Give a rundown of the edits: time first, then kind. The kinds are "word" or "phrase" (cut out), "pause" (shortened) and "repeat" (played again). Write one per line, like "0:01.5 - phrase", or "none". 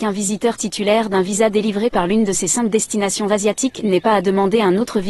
none